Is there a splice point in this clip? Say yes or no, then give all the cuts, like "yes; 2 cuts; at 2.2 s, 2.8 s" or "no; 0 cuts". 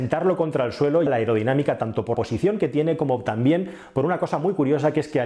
yes; 2 cuts; at 1.1 s, 2.1 s